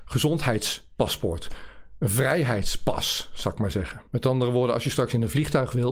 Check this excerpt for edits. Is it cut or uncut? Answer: cut